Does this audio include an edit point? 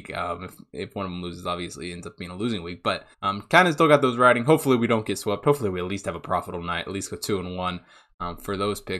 yes; 1 cut; at 3.1 s

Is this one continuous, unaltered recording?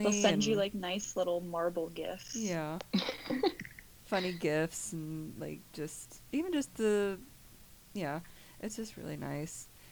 no; 1 cut; at 6.3 s

